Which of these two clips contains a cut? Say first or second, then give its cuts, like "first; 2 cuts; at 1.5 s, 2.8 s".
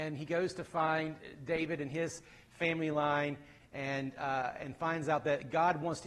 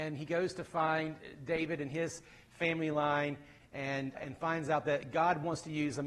second; 1 cut; at 4.1 s